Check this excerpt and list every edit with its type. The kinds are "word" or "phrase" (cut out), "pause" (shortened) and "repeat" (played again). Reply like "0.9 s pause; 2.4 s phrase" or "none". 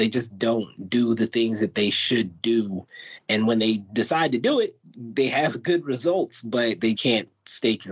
7.0 s word